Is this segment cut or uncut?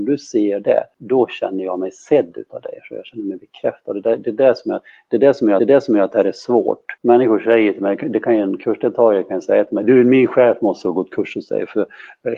cut